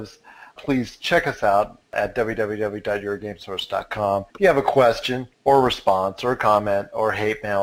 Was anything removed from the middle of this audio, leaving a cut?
yes; 2 cuts; at 4.3 s, 5.3 s

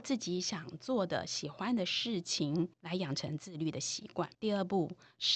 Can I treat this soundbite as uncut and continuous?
no; 2 cuts; at 2.7 s, 4.3 s

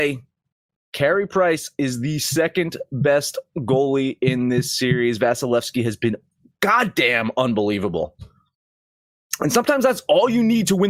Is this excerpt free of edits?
yes; 0 cuts

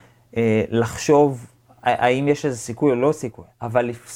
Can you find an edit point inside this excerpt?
no; 0 cuts

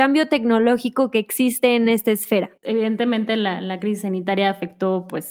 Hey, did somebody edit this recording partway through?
yes; 1 cut; at 2.6 s

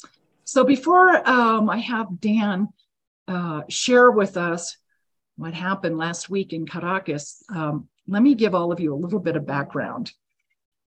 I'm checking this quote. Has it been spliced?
no; 0 cuts

